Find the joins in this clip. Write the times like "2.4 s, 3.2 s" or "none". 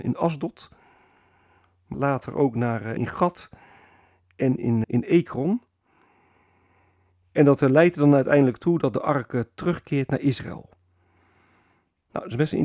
1.9 s, 3.0 s, 4.8 s